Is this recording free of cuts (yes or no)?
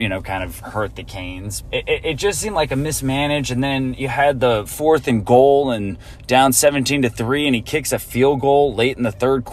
no